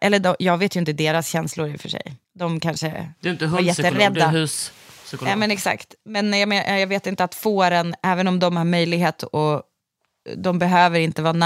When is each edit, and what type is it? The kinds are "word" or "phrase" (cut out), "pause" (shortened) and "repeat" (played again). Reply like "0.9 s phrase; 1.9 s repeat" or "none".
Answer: 2.2 s pause